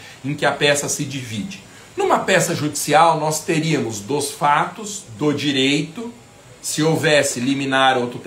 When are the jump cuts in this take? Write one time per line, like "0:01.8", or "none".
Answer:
none